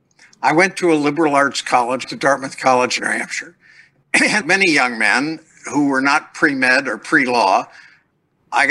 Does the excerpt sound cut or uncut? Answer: cut